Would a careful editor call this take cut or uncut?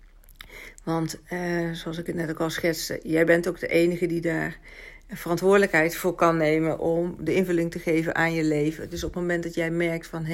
uncut